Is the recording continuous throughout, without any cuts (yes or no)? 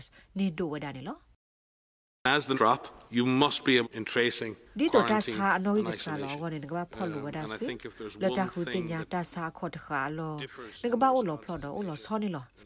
no